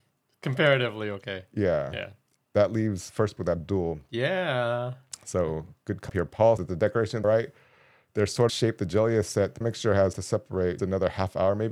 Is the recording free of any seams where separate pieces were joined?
no; 8 cuts; at 3.4 s, 6.1 s, 6.6 s, 7.2 s, 8.5 s, 9.6 s, 10.1 s, 10.8 s

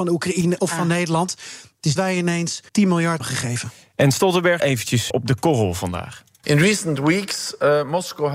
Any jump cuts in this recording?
yes; 5 cuts; at 2.0 s, 2.7 s, 3.2 s, 4.6 s, 5.1 s

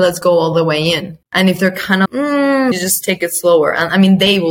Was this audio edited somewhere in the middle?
yes; 3 cuts; at 1.2 s, 2.1 s, 2.7 s

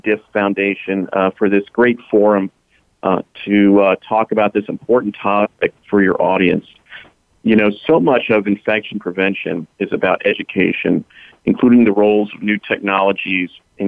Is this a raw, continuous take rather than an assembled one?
yes; 0 cuts

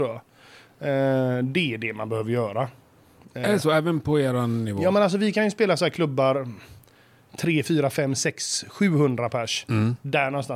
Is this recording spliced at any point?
no; 0 cuts

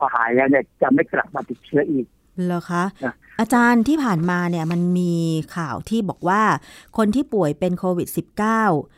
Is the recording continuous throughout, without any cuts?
yes; 0 cuts

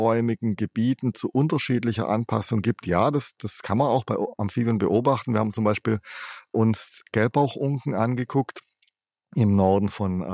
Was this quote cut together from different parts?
no; 0 cuts

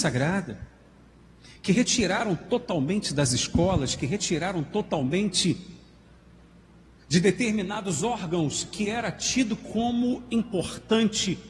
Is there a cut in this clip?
no; 0 cuts

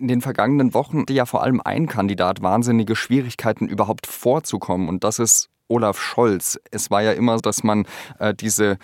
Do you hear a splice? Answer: yes; 2 cuts; at 1.1 s, 7.4 s

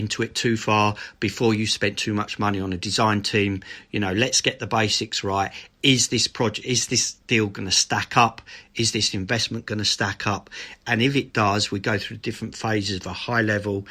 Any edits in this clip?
no; 0 cuts

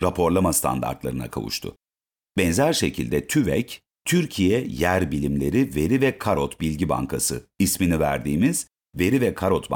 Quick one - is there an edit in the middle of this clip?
no; 0 cuts

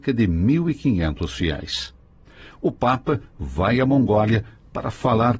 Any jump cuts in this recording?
no; 0 cuts

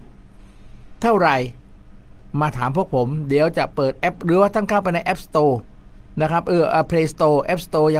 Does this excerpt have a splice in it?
no; 0 cuts

